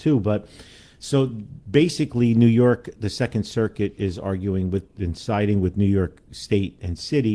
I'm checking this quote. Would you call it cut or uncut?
uncut